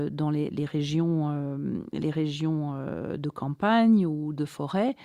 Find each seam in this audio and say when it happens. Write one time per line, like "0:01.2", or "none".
none